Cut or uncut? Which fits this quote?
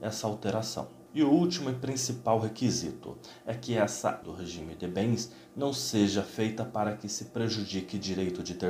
cut